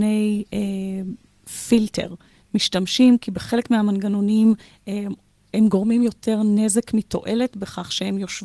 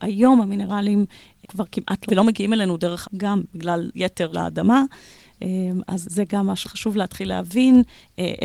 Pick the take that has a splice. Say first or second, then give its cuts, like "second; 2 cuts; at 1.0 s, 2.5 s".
second; 7 cuts; at 1.4 s, 2.1 s, 3.0 s, 3.9 s, 4.3 s, 6.0 s, 6.6 s